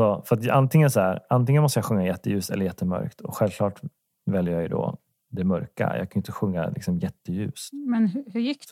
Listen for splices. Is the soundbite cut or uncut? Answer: uncut